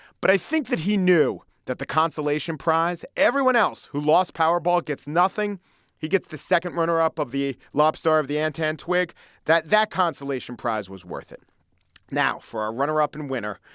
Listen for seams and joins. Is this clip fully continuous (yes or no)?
yes